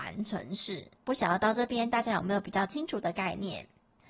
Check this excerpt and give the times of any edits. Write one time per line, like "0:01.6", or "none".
0:00.9